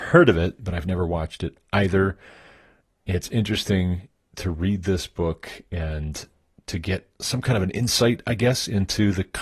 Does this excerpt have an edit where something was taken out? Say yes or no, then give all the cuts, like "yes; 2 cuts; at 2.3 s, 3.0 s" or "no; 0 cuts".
no; 0 cuts